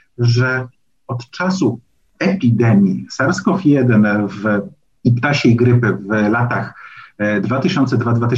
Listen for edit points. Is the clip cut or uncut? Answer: uncut